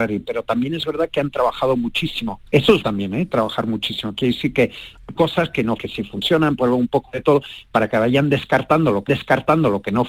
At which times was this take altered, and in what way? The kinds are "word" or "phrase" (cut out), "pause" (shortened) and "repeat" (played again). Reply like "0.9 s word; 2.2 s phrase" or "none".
2.5 s pause; 2.8 s word; 5.1 s word; 5.8 s phrase; 9.1 s repeat